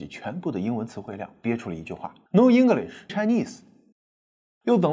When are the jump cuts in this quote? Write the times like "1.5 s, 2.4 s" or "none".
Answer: 2.3 s, 3.1 s